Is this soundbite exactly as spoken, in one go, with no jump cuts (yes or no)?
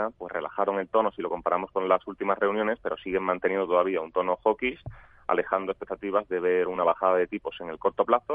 yes